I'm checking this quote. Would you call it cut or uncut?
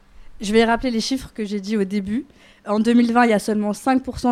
uncut